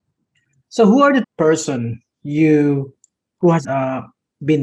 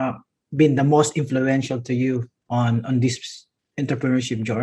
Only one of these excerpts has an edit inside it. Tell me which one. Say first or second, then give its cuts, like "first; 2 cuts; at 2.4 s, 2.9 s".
first; 3 cuts; at 1.2 s, 3.2 s, 3.6 s